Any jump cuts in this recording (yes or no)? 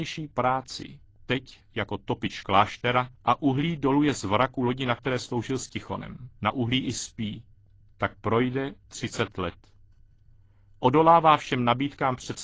yes